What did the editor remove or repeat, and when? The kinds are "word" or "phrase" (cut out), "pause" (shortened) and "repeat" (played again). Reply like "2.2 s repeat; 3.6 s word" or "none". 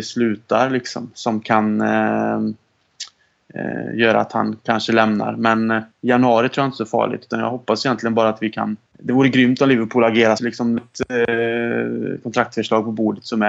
5.9 s pause; 8.9 s pause; 10.4 s word; 10.8 s phrase